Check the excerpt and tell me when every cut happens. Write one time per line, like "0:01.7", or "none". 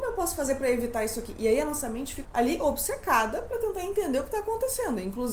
0:02.2